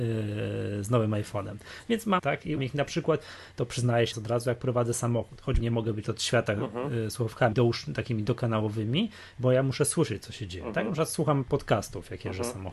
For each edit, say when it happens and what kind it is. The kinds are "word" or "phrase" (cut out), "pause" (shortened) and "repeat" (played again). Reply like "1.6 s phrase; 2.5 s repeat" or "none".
2.2 s word; 2.6 s word; 4.1 s word; 5.6 s word; 6.0 s word; 7.5 s word

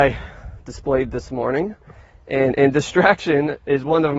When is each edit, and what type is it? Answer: none

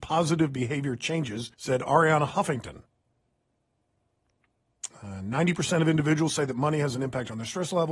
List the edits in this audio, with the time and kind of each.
1.5 s pause

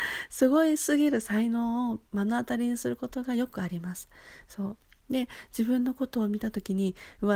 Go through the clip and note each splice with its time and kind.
none

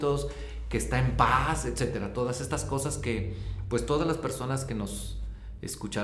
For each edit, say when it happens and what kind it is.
none

